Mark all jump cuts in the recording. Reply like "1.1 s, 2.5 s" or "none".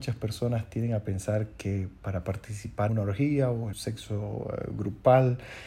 2.9 s, 3.7 s